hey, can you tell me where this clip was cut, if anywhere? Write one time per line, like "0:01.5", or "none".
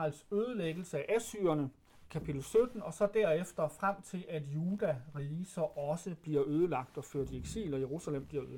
0:01.9